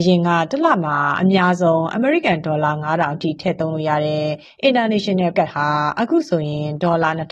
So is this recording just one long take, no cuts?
no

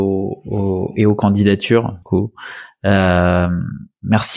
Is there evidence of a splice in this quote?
yes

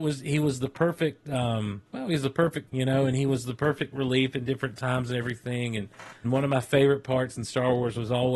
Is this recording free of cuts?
no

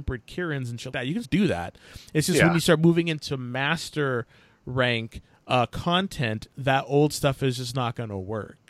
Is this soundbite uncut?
no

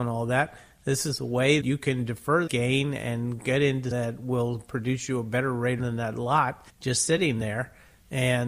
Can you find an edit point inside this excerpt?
yes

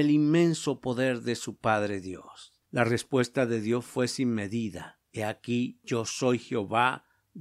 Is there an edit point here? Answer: no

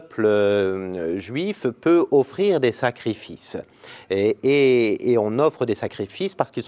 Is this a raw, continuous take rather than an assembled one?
yes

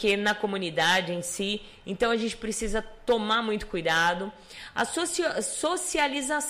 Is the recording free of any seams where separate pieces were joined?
yes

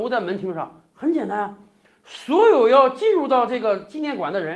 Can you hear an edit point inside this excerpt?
no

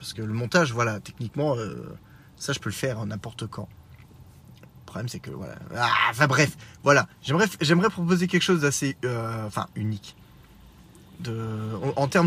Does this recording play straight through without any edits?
no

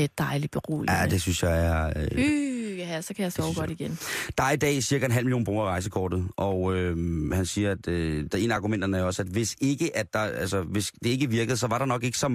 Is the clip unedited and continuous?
yes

